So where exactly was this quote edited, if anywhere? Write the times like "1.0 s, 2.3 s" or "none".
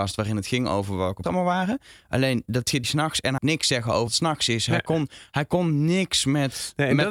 1.2 s, 2.8 s, 3.4 s, 4.1 s

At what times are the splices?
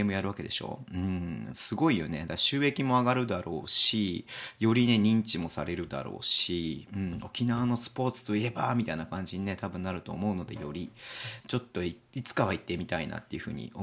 11.4 s

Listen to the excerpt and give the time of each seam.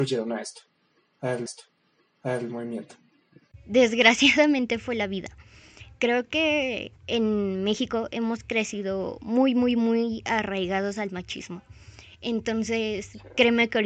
1.5 s, 7.0 s

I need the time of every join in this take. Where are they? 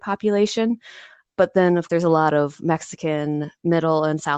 1.3 s, 1.9 s

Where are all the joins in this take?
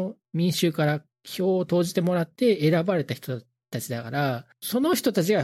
1.1 s

